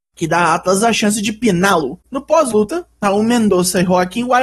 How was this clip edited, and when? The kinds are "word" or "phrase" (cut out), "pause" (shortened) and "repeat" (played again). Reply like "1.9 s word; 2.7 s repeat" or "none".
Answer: 2.0 s pause